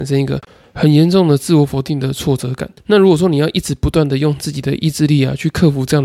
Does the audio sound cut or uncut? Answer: cut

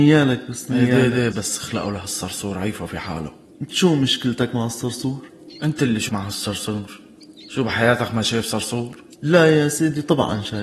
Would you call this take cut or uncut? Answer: cut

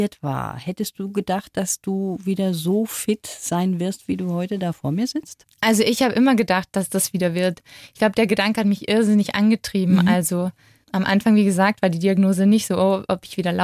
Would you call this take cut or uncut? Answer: uncut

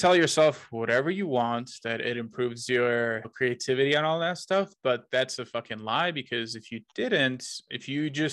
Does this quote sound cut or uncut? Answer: uncut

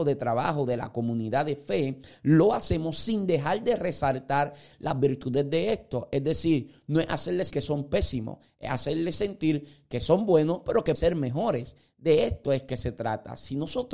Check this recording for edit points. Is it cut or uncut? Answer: cut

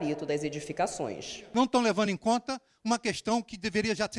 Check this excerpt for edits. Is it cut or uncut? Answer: uncut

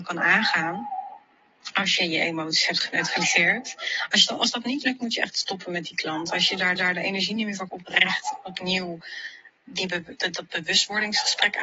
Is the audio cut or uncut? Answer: cut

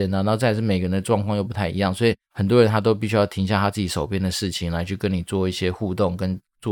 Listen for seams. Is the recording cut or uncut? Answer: cut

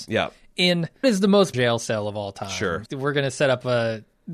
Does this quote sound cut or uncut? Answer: cut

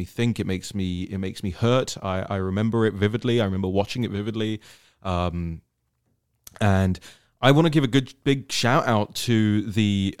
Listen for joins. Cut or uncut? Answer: uncut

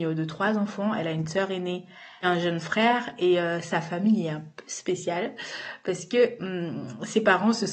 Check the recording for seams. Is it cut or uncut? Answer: cut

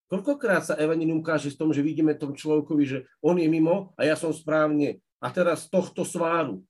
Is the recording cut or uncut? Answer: cut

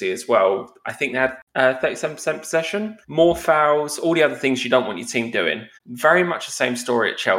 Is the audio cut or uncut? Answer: cut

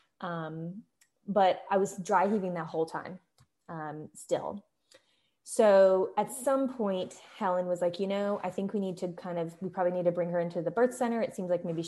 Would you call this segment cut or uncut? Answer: uncut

